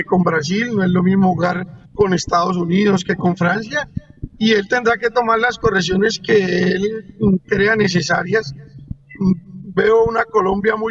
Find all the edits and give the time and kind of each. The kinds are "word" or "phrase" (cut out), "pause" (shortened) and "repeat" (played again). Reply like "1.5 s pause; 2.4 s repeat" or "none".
1.9 s pause